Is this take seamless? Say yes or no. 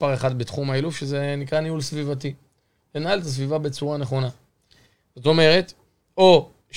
yes